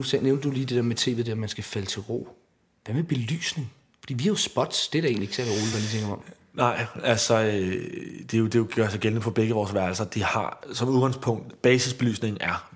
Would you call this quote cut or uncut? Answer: uncut